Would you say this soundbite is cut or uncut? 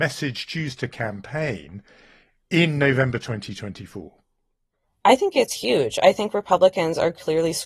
uncut